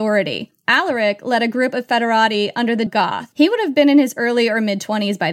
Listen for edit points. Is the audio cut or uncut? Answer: cut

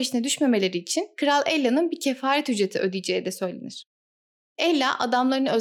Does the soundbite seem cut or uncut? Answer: uncut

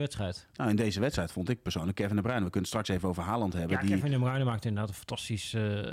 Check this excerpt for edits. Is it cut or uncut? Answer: uncut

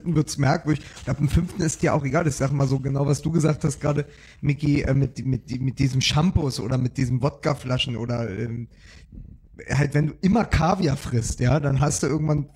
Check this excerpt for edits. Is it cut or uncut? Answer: uncut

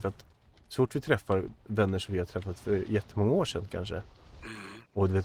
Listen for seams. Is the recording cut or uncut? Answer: uncut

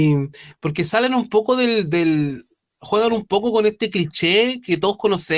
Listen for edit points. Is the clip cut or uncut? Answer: uncut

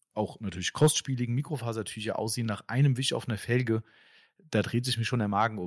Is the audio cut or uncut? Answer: uncut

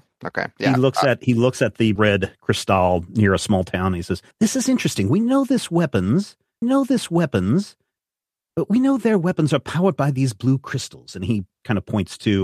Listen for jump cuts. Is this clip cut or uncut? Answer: cut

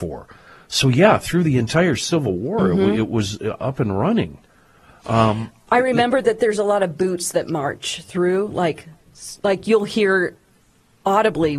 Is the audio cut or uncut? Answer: uncut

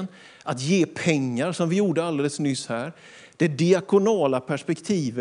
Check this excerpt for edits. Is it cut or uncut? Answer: uncut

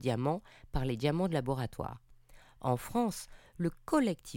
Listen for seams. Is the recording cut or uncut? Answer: uncut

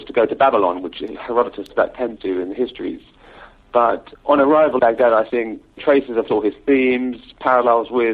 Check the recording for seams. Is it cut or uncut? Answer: cut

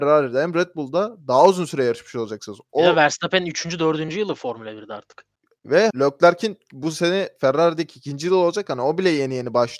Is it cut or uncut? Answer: cut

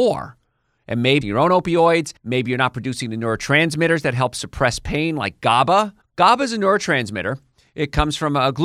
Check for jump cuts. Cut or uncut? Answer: cut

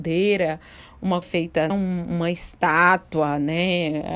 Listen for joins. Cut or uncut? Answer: cut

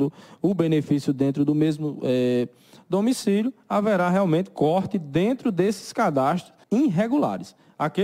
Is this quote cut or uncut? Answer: cut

